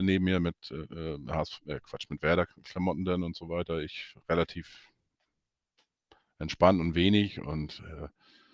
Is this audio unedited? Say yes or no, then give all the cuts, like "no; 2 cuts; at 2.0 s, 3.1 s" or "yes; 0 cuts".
yes; 0 cuts